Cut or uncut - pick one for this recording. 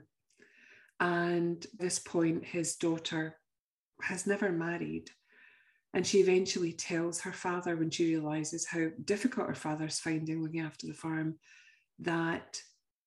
cut